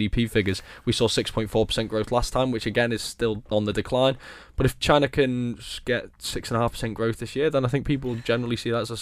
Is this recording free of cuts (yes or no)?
yes